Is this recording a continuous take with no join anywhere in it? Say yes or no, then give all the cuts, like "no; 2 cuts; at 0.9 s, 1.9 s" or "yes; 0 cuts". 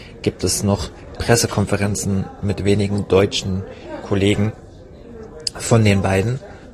no; 1 cut; at 1.2 s